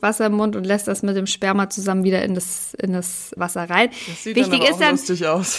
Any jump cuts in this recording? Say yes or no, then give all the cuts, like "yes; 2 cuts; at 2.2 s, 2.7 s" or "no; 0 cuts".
yes; 1 cut; at 3.4 s